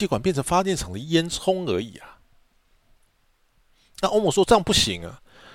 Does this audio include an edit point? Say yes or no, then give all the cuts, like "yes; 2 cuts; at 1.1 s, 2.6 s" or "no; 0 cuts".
no; 0 cuts